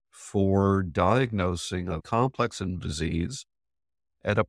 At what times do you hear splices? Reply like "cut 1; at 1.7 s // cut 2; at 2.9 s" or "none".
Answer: cut 1; at 2.0 s // cut 2; at 2.8 s